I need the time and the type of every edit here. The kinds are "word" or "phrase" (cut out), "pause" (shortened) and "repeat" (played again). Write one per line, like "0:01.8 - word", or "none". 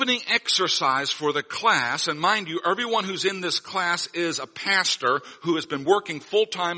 none